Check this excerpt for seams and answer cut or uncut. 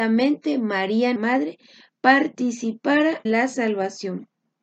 cut